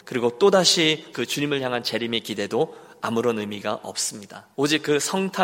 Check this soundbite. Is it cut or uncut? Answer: cut